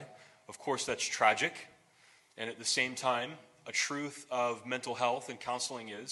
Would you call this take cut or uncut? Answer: uncut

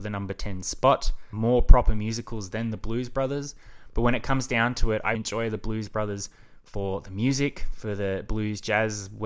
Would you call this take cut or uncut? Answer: cut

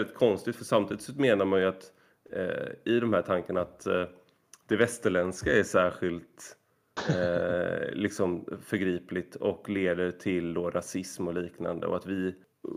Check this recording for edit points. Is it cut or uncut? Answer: uncut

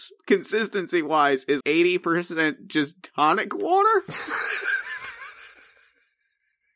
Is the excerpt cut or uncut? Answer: cut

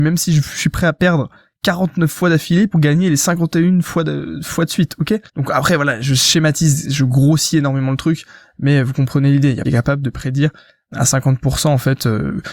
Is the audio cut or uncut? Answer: cut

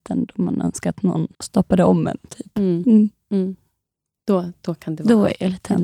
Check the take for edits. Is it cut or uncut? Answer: cut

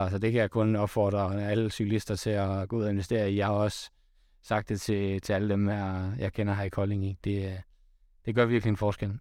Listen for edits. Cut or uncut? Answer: uncut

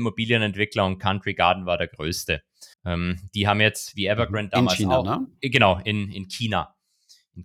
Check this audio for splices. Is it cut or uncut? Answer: cut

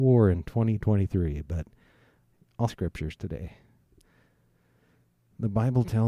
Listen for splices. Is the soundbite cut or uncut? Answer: cut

